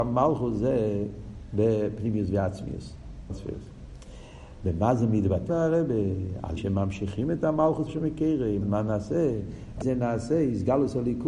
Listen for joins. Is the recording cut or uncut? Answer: cut